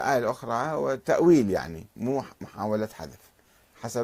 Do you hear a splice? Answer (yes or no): yes